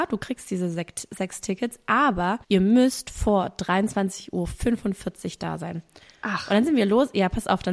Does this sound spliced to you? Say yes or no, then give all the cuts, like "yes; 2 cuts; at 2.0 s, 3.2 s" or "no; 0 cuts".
yes; 1 cut; at 2.4 s